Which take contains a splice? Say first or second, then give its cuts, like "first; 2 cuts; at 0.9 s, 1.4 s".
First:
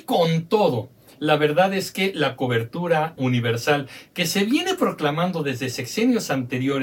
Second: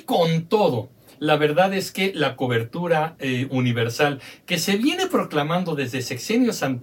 first; 1 cut; at 3.2 s